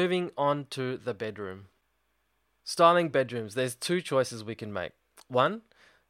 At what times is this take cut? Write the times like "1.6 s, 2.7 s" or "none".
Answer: none